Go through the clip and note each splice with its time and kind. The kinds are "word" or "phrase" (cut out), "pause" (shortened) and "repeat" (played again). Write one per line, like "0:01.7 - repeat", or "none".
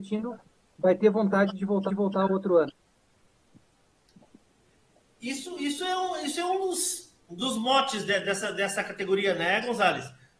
0:01.9 - repeat
0:07.2 - pause